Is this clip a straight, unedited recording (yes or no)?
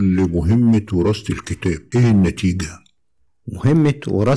yes